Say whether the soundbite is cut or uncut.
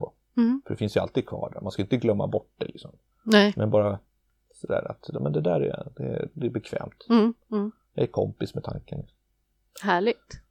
uncut